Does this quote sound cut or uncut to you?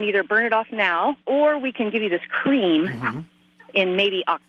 uncut